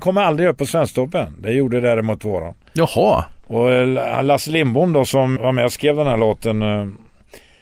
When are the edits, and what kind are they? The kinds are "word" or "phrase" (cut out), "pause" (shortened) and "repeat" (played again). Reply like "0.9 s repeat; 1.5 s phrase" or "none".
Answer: 5.4 s word